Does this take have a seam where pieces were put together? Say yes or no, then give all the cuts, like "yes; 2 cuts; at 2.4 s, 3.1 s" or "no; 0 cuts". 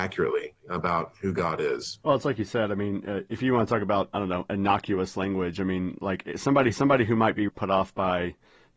yes; 3 cuts; at 2.0 s, 6.7 s, 7.5 s